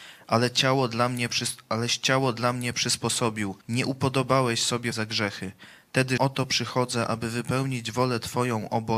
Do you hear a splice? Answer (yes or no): yes